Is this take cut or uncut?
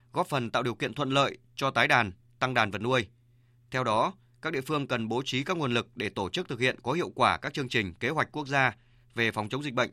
uncut